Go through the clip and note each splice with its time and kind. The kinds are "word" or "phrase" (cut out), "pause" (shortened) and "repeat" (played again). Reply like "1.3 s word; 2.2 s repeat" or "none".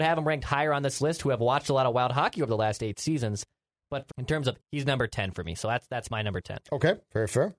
4.1 s word; 4.6 s word